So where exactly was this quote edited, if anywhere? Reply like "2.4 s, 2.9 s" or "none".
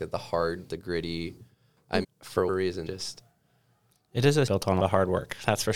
2.0 s, 2.5 s, 2.9 s, 4.5 s, 4.8 s